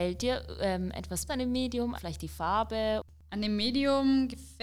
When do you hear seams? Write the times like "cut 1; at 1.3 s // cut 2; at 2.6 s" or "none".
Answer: cut 1; at 1.3 s // cut 2; at 2.0 s